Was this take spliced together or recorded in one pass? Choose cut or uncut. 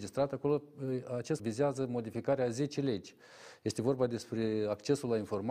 cut